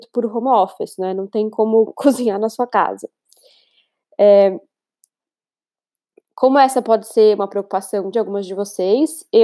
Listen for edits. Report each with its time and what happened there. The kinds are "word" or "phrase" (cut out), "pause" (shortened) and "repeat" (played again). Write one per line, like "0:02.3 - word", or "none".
0:01.9 - word
0:08.1 - word